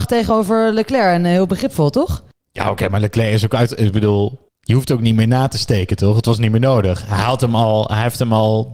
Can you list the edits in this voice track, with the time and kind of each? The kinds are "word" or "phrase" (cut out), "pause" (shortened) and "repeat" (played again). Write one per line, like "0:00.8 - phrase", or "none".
0:04.5 - pause